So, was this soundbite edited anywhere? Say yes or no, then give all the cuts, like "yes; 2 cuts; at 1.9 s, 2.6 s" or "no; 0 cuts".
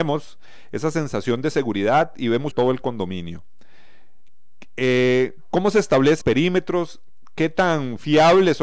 yes; 2 cuts; at 2.5 s, 6.2 s